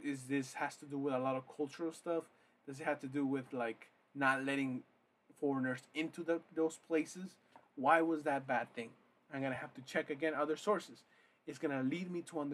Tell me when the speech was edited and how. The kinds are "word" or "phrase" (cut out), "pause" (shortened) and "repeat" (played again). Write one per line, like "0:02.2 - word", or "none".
none